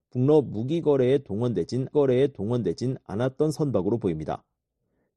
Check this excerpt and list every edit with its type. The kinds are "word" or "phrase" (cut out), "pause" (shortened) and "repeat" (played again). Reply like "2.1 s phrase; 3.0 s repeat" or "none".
1.9 s repeat